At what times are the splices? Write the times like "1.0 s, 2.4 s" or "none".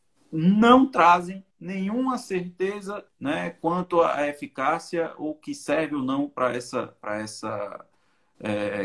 1.5 s, 3.1 s